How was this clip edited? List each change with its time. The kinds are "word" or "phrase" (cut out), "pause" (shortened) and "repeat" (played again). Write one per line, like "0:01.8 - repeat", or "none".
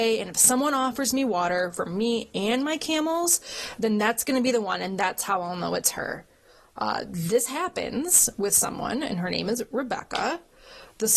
none